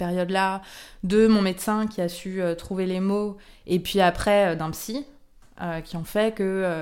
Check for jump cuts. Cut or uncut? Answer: uncut